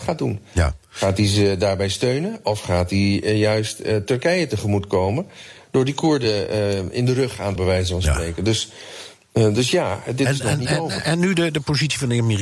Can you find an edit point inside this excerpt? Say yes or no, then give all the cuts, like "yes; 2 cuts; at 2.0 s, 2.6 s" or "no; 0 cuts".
yes; 1 cut; at 7.6 s